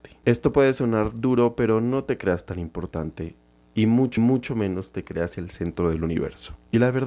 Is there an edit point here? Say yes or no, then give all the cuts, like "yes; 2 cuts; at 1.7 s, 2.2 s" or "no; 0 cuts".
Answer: yes; 1 cut; at 4.2 s